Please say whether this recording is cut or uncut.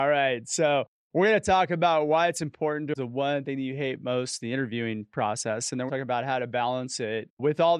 cut